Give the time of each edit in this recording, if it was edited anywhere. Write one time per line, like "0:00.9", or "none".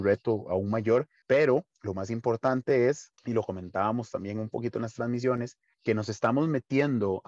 0:03.2